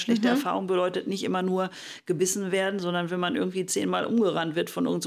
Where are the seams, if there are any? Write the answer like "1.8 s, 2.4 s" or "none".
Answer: none